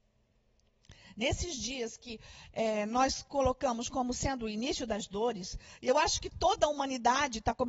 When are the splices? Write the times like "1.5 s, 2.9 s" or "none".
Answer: none

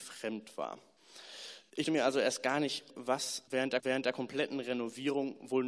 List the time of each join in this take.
1.8 s, 2.9 s, 3.8 s

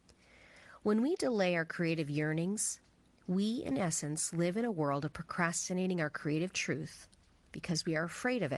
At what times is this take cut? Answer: none

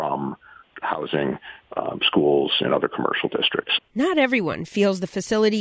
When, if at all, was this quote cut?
none

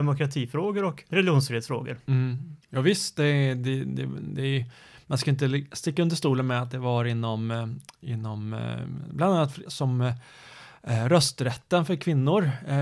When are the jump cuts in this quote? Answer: 9.7 s

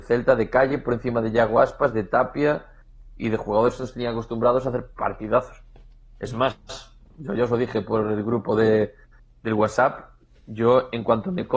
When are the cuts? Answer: none

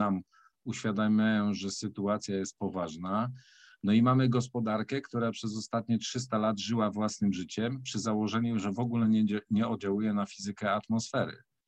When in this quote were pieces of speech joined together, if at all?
none

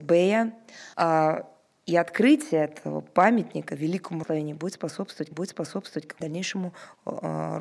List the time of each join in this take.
0.9 s, 4.2 s, 5.3 s, 6.2 s

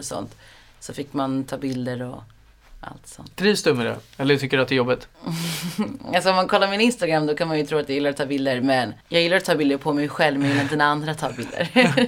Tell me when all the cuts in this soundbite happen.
5.1 s, 9.0 s

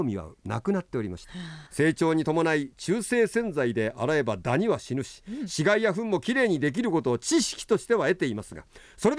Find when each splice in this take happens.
1.7 s

